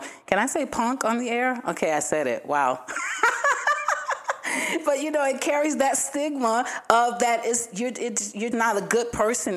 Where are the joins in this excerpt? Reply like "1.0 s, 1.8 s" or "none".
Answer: 8.5 s